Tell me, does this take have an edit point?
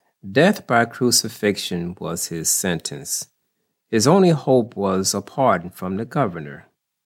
no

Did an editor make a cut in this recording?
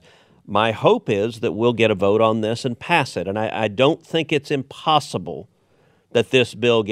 no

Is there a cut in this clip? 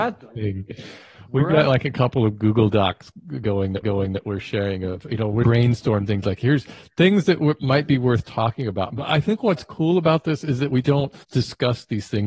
yes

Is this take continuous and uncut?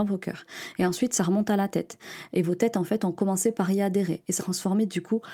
no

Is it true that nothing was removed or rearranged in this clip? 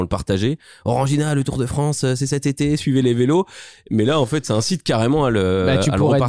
yes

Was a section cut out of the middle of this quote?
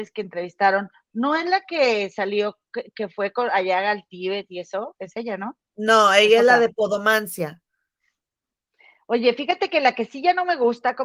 no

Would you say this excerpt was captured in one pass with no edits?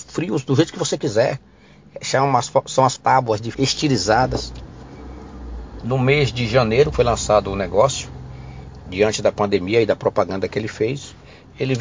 no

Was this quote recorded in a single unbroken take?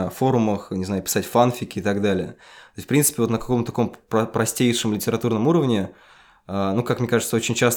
yes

